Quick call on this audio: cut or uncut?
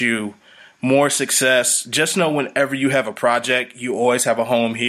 uncut